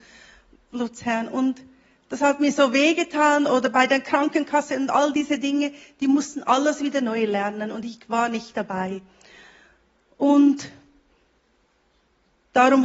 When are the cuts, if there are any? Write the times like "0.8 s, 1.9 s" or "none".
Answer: none